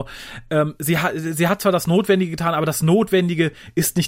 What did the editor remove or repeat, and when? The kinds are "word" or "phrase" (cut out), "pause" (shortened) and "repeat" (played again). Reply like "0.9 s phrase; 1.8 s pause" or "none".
none